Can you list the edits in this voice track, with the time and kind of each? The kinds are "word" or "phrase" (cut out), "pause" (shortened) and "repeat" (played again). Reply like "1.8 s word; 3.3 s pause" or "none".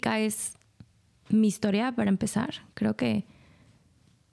0.9 s pause

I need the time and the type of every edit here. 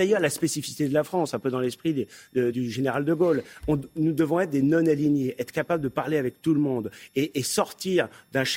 2.5 s word

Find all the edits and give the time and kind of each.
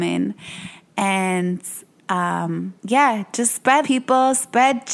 2.8 s pause; 3.8 s word

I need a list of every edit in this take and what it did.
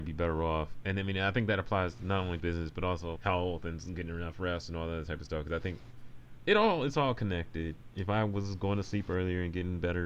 2.4 s word; 3.1 s word

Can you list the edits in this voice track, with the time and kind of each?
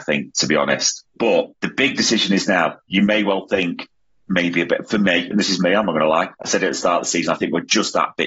1.5 s pause; 4.1 s pause; 6.3 s pause

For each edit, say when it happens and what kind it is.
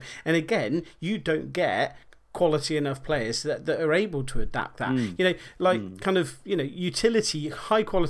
4.7 s word

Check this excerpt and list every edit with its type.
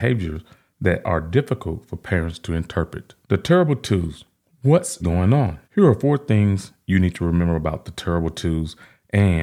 3.2 s pause; 5.0 s word; 5.6 s pause

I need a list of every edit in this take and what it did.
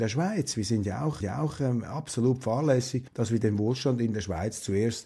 1.2 s repeat; 3.1 s pause

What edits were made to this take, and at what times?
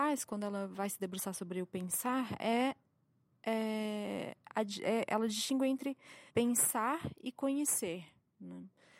6.3 s pause

